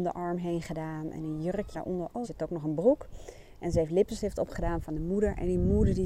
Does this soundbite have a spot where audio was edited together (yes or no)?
yes